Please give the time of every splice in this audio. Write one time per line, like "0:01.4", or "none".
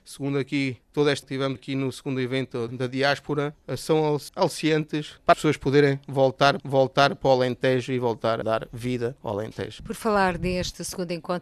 0:01.2
0:01.6
0:02.7
0:05.3
0:06.6
0:08.4